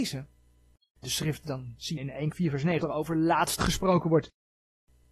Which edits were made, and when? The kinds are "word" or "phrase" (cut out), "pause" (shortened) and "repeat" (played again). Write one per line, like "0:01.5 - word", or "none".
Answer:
0:01.0 - word
0:01.4 - word
0:02.0 - word
0:02.3 - word
0:02.8 - word
0:03.6 - word